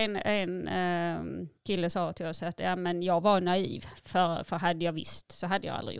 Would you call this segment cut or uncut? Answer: cut